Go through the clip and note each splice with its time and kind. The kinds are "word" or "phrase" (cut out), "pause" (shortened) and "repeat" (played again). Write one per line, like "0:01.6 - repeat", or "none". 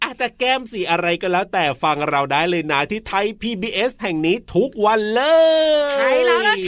0:04.0 - word

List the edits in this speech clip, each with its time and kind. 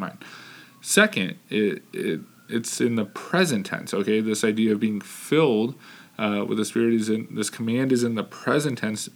none

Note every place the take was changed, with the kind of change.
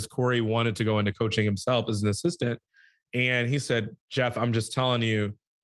0:04.0 - pause

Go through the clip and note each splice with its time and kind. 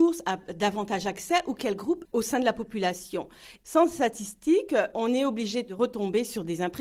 0:02.1 - phrase

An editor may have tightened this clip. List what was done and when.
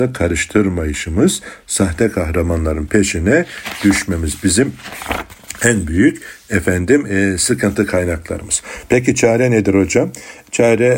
none

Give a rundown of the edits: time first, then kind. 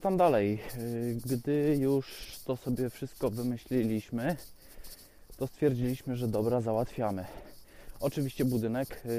none

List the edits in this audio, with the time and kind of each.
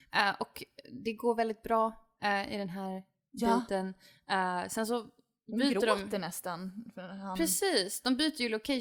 none

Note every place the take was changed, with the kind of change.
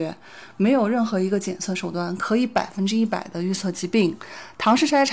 none

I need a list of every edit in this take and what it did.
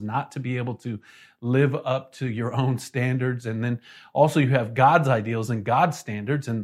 none

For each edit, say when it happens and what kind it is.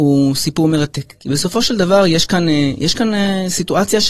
none

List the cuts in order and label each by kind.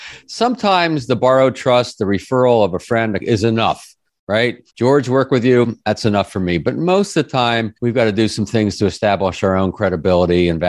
0:03.2 - word
0:04.7 - pause
0:07.8 - pause

